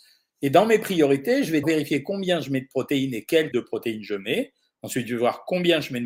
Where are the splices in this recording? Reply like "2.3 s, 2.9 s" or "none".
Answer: 1.6 s, 3.5 s